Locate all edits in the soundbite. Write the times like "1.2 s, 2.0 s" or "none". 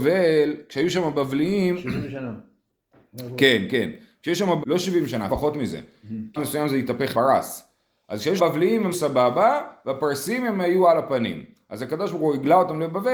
4.6 s, 5.3 s, 6.4 s, 7.1 s, 8.4 s, 8.9 s